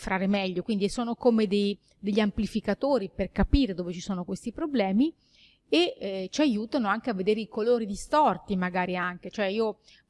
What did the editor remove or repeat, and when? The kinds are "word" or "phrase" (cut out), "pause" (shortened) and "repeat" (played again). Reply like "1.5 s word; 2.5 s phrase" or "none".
none